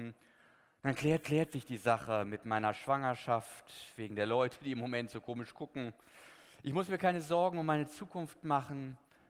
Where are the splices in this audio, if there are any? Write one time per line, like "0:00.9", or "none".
0:01.2

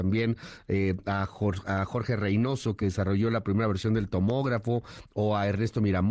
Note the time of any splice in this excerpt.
none

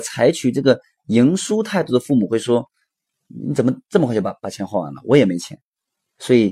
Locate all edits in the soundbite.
0:03.3

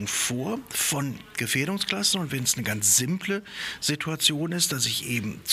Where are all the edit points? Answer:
none

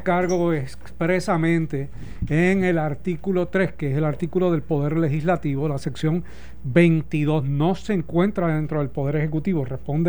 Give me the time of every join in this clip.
none

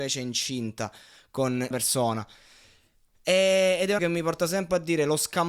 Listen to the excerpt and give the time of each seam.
0:01.7
0:04.0

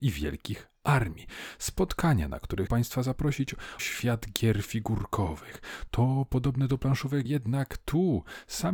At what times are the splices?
0:02.7
0:03.8
0:07.2

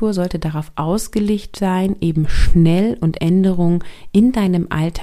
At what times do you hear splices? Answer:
0:03.2

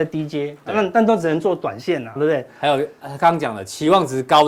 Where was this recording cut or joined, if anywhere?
0:02.2

